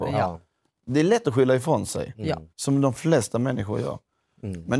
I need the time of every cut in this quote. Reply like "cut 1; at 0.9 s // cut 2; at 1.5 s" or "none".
cut 1; at 2.5 s